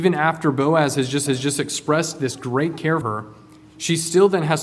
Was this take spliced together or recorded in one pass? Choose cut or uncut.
cut